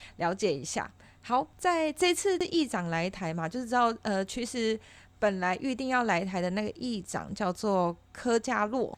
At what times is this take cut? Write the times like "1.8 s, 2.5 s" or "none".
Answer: none